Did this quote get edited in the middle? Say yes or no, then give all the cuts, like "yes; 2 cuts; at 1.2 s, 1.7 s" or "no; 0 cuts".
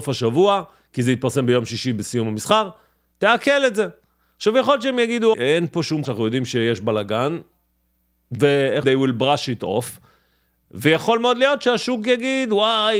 yes; 3 cuts; at 5.3 s, 6.0 s, 8.8 s